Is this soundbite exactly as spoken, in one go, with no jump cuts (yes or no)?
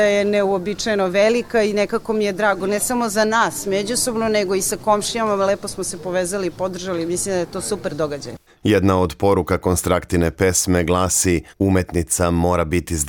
no